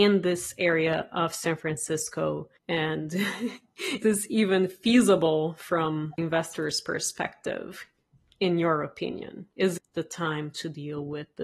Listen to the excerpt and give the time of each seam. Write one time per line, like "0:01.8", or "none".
0:04.0
0:06.2
0:09.8

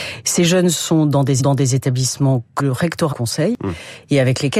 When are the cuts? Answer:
0:01.4
0:02.6
0:03.1

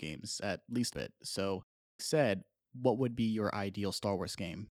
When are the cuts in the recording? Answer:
0:00.9
0:02.0

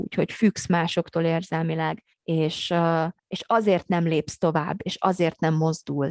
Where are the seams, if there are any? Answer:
0:02.1
0:03.2

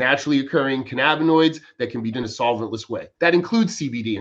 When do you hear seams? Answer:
0:02.1
0:03.2

